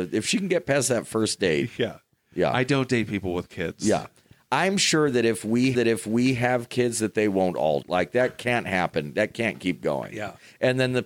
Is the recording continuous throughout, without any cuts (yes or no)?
no